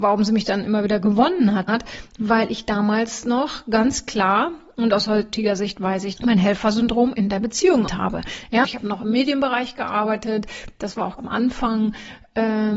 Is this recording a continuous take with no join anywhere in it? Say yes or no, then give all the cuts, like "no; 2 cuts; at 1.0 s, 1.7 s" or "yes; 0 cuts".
no; 5 cuts; at 1.7 s, 6.2 s, 7.9 s, 8.6 s, 11.2 s